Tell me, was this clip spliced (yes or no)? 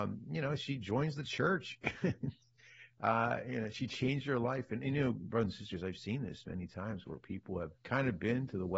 yes